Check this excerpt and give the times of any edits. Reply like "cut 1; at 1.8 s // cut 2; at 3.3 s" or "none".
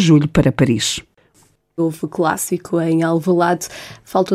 none